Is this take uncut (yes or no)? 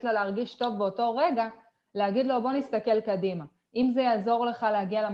yes